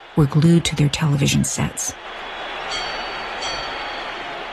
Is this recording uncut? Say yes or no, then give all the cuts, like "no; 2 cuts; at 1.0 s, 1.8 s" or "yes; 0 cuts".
yes; 0 cuts